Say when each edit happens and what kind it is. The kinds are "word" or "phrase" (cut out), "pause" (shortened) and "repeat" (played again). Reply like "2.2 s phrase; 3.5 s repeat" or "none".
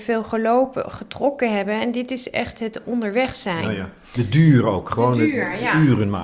none